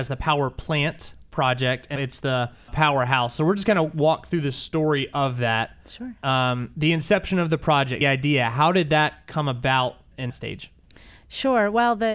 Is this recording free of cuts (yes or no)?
no